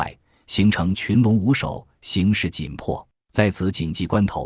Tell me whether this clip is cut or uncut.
cut